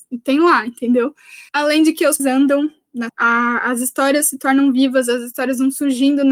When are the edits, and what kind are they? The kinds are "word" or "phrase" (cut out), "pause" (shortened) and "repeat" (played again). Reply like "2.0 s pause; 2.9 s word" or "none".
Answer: 1.5 s pause; 2.2 s word; 3.1 s word